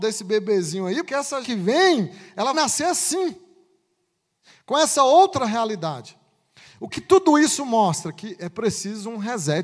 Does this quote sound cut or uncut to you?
cut